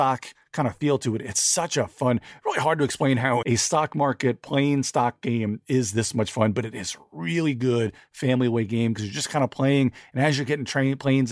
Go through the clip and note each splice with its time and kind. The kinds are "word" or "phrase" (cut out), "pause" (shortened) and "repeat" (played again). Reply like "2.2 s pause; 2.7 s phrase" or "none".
3.4 s word